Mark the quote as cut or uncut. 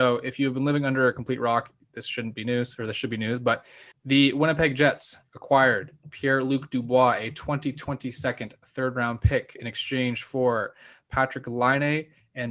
cut